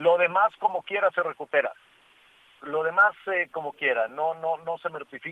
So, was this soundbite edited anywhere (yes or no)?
no